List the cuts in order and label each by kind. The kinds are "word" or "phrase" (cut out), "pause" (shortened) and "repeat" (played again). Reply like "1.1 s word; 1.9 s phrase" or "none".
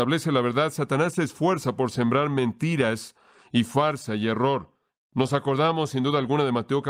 none